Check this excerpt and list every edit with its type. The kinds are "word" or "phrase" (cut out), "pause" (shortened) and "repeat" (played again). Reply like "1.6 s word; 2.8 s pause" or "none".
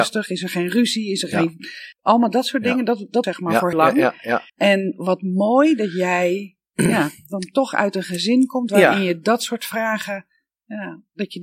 1.9 s pause; 3.2 s phrase; 3.7 s word; 4.5 s pause